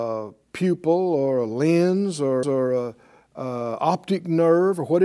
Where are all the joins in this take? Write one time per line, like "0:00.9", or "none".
0:02.4